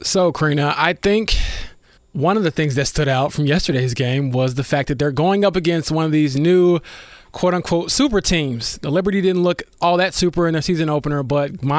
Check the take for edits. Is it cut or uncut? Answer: cut